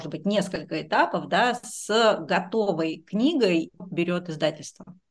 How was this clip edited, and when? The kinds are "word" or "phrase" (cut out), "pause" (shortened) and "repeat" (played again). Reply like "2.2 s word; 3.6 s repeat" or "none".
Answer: 3.8 s phrase